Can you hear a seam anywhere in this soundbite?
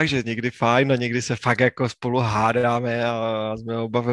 no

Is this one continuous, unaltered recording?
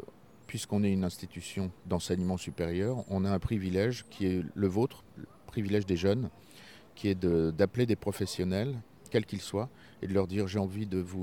no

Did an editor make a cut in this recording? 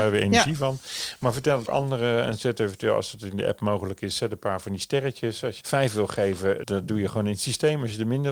yes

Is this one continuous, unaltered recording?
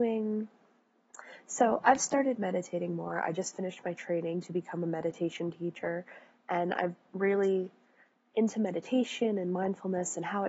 no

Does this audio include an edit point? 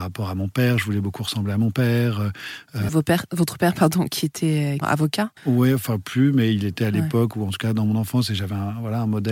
yes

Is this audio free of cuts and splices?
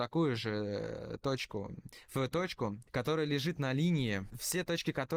yes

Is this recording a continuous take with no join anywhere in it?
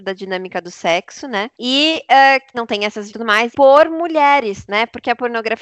no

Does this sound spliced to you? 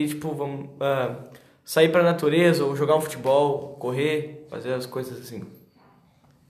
no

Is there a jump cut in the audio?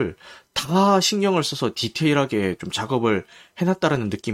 no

